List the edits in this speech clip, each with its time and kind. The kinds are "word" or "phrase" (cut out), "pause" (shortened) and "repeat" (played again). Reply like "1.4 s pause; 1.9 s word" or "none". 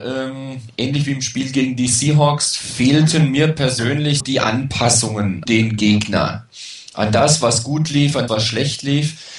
4.2 s word; 5.5 s word; 8.3 s word